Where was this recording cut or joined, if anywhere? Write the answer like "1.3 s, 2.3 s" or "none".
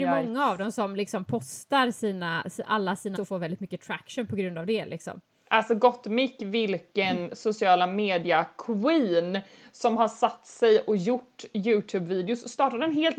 3.2 s